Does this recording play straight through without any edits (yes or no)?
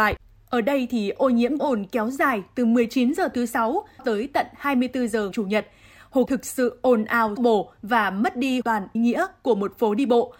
no